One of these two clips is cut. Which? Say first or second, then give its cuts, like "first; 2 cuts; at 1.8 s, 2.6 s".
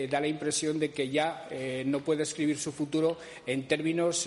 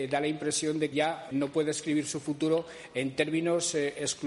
second; 2 cuts; at 0.9 s, 1.3 s